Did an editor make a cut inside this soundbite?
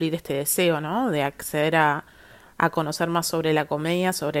no; 0 cuts

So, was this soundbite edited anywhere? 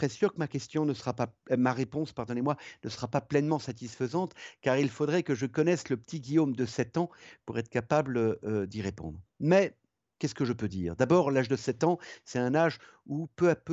no; 0 cuts

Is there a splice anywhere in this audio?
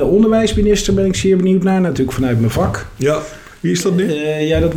no; 0 cuts

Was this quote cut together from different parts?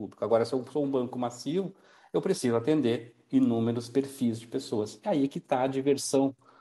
no; 0 cuts

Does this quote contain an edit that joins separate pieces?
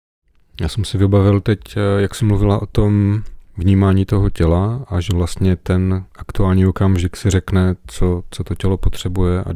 no; 0 cuts

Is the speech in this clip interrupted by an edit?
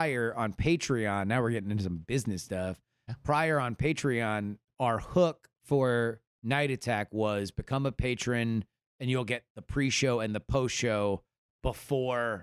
no; 0 cuts

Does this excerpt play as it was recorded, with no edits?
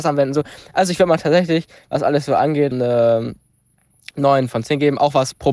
no; 1 cut; at 2.7 s

